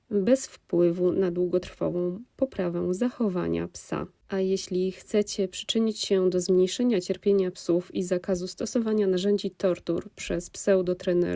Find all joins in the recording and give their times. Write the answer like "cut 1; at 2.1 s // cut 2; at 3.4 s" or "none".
cut 1; at 4.2 s